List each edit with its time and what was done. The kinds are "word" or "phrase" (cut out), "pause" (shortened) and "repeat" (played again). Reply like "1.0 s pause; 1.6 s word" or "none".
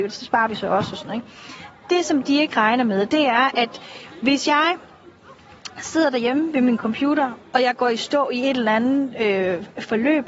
none